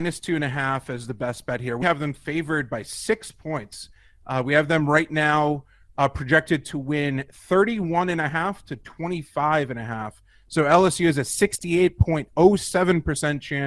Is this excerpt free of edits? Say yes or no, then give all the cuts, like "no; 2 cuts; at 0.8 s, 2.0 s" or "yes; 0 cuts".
no; 1 cut; at 1.8 s